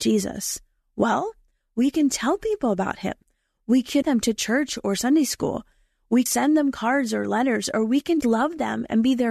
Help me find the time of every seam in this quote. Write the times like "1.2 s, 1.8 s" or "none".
4.0 s, 6.3 s, 8.2 s